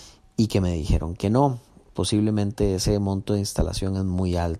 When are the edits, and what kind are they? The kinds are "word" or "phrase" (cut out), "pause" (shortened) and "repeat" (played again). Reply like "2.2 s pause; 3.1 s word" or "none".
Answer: none